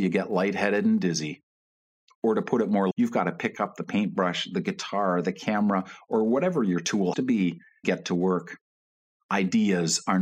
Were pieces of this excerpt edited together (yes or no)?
yes